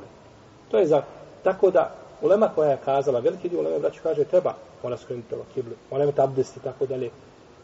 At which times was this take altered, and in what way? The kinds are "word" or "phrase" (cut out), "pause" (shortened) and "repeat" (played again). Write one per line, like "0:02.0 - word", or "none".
0:04.7 - pause